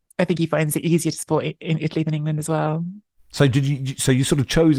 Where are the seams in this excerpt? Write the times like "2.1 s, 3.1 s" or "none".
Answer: none